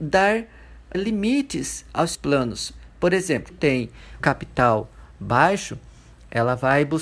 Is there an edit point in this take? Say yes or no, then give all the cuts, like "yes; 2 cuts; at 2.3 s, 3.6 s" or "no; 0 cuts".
yes; 4 cuts; at 0.9 s, 2.1 s, 3.5 s, 4.2 s